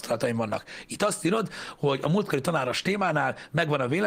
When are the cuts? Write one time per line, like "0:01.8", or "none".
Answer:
none